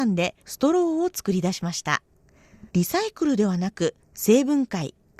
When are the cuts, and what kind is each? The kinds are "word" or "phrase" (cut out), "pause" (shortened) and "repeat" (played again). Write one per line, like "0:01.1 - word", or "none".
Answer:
0:02.7 - pause
0:04.0 - pause